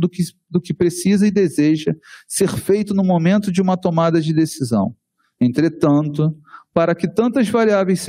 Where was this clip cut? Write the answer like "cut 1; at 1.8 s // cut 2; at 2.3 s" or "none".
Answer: none